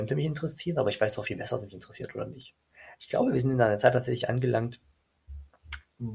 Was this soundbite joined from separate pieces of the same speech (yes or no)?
no